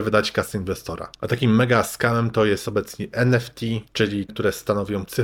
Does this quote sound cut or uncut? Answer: cut